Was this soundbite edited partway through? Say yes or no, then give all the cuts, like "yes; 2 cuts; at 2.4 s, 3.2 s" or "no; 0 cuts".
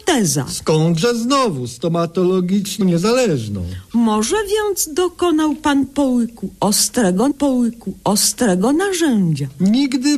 yes; 2 cuts; at 2.8 s, 7.3 s